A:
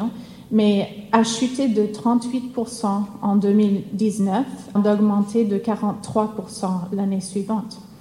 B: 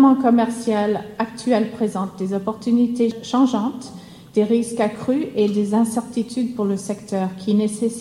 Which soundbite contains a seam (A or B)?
A